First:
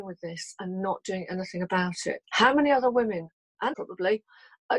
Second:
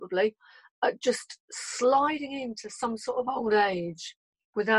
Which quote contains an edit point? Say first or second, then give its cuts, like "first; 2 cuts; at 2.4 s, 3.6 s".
first; 2 cuts; at 2.2 s, 3.7 s